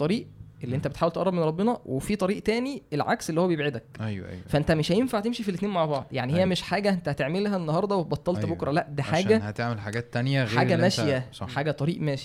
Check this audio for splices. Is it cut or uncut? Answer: uncut